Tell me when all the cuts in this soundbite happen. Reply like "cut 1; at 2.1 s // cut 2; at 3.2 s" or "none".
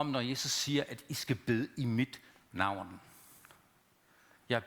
none